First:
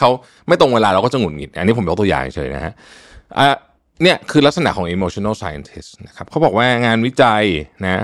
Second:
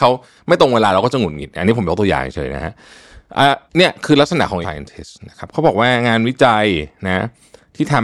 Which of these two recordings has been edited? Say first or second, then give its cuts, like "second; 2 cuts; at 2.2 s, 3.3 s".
second; 2 cuts; at 3.7 s, 4.6 s